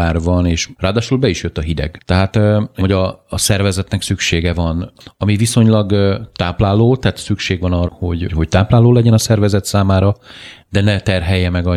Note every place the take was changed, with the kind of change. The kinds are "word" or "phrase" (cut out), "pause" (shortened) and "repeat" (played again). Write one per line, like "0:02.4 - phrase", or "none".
0:02.8 - phrase
0:07.9 - word
0:08.3 - word